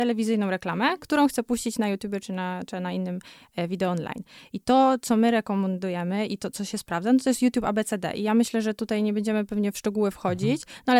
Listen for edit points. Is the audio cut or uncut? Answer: uncut